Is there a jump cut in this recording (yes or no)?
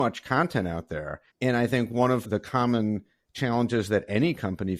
yes